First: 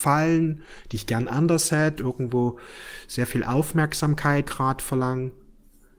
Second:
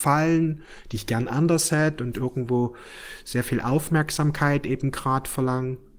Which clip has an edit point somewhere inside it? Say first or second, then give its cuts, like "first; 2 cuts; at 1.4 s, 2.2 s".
first; 2 cuts; at 2.0 s, 4.4 s